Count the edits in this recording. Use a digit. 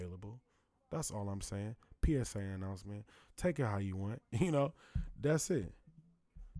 0